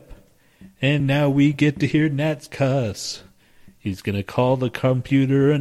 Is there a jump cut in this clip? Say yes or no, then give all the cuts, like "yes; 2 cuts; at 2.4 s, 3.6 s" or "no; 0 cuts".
no; 0 cuts